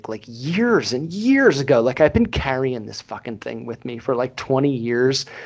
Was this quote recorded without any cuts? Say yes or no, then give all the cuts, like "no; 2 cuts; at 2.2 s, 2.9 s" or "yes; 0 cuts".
yes; 0 cuts